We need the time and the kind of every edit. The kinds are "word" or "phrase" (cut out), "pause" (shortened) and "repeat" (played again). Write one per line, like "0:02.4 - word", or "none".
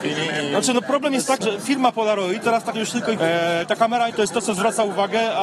0:01.4 - word
0:02.4 - word
0:02.7 - word
0:03.2 - phrase
0:04.1 - word